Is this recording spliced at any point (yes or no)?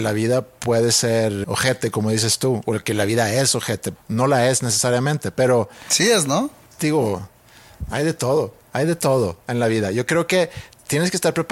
yes